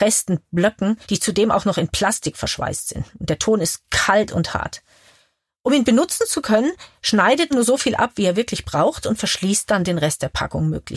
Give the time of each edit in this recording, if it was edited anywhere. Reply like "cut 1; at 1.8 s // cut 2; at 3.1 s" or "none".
cut 1; at 1.0 s // cut 2; at 7.5 s